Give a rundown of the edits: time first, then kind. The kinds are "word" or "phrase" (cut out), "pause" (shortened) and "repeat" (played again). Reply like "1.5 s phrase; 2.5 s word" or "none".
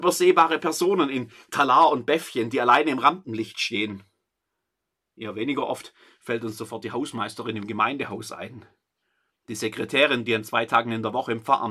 none